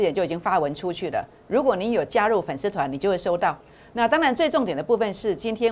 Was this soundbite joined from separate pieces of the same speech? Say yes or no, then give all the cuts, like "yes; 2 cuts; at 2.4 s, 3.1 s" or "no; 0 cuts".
no; 0 cuts